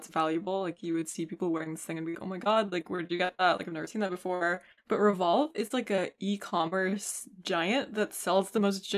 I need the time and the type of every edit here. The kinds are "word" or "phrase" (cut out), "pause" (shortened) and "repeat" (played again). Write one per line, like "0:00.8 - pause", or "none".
0:02.1 - word
0:04.8 - pause